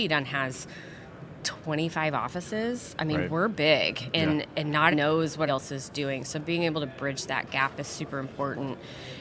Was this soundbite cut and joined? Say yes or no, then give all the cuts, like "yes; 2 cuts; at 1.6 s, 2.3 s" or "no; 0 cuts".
yes; 2 cuts; at 4.9 s, 5.5 s